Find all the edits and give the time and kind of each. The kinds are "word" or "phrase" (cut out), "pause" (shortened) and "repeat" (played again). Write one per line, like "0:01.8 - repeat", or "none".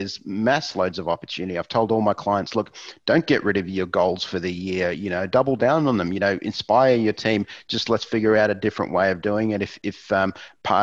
none